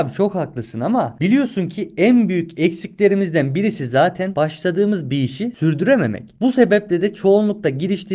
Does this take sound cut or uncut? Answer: uncut